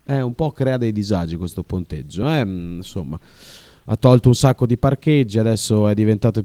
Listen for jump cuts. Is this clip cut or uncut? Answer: uncut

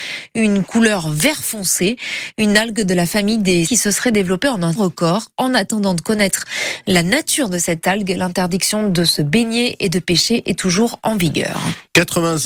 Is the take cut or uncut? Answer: cut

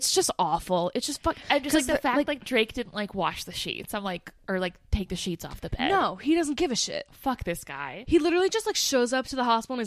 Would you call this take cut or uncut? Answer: uncut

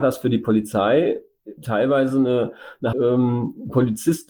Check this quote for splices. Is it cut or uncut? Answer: cut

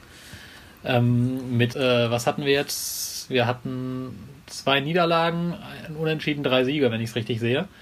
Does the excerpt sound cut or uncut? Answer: cut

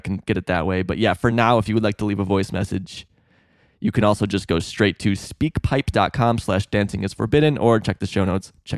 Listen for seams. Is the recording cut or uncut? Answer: uncut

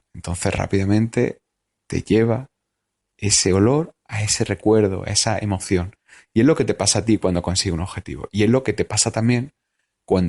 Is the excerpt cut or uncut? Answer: uncut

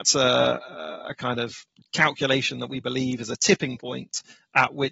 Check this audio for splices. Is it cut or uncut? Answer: uncut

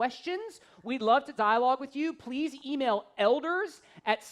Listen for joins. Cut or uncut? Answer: uncut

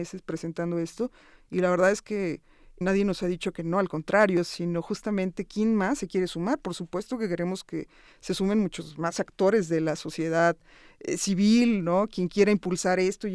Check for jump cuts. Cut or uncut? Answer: cut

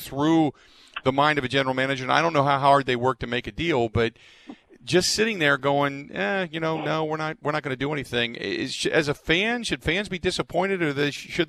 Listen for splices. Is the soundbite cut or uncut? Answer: uncut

